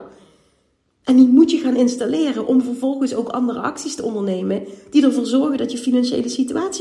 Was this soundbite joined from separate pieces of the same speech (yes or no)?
no